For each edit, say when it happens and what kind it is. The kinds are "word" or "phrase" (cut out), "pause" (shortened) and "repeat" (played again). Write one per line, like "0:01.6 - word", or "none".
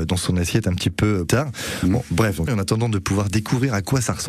0:01.3 - word
0:02.5 - phrase